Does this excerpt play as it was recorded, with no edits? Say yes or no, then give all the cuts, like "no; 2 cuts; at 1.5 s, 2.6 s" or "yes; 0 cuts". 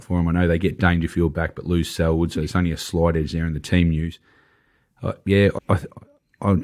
no; 1 cut; at 5.6 s